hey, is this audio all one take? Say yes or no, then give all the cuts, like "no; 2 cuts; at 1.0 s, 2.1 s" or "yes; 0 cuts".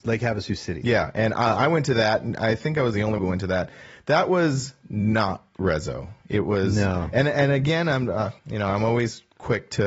no; 2 cuts; at 3.2 s, 8.4 s